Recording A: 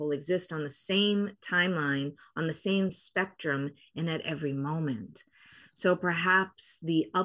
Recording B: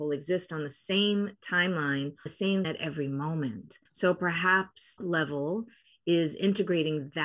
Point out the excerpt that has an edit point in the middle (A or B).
B